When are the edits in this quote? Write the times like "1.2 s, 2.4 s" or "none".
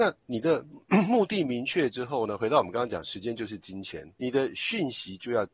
4.2 s